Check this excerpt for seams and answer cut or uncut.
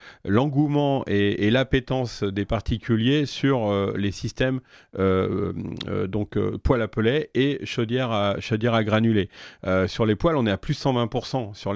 uncut